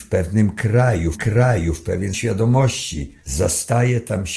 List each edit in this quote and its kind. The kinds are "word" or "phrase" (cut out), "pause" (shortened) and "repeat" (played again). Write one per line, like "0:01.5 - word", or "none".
0:01.1 - repeat
0:02.1 - word
0:03.2 - pause